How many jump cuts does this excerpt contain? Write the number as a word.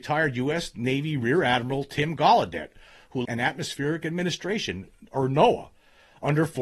one